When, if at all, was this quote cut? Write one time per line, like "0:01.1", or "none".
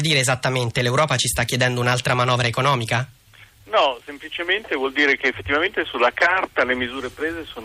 none